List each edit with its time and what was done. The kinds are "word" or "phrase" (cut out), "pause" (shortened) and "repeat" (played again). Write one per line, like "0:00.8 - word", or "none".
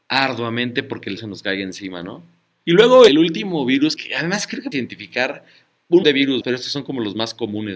0:01.2 - word
0:03.1 - word
0:04.0 - word
0:04.7 - word
0:06.0 - word
0:06.4 - word

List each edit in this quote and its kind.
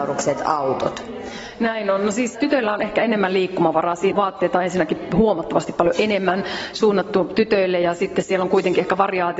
0:02.3 - word
0:04.1 - phrase

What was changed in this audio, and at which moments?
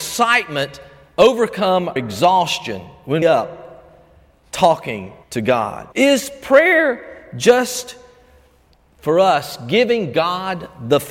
0:02.0 - word
0:03.2 - phrase
0:05.2 - pause
0:05.9 - pause

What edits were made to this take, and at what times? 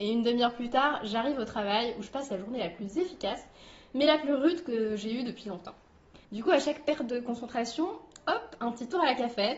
0:06.2 - pause

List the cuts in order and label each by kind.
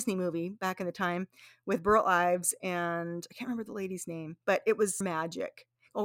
0:05.0 - word

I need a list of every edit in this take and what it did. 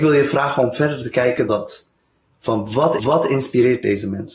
0:01.5 - word
0:03.0 - repeat

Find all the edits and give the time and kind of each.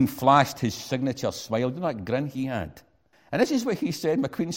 0:03.1 - pause

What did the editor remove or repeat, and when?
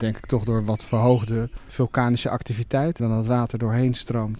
0:03.0 - word

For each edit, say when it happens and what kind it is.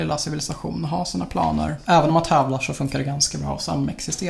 none

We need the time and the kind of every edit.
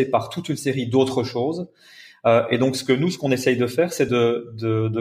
none

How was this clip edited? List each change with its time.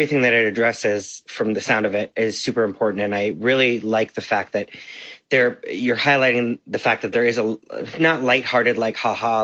none

